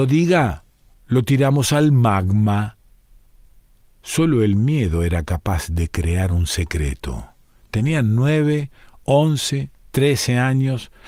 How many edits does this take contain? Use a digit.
0